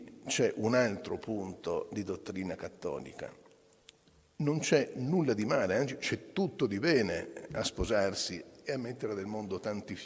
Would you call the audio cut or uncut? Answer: uncut